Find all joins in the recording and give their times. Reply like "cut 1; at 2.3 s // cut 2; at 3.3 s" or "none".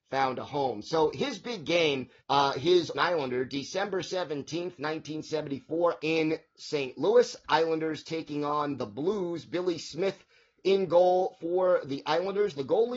cut 1; at 2.2 s // cut 2; at 2.9 s // cut 3; at 6.0 s